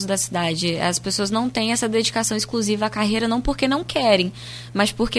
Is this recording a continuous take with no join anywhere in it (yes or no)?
yes